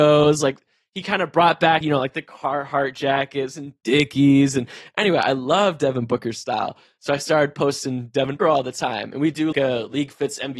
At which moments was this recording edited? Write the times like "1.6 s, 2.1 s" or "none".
1.8 s, 8.4 s, 9.5 s